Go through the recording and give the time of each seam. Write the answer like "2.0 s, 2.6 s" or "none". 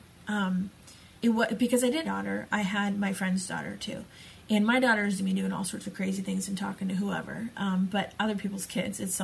1.2 s, 2.0 s, 5.2 s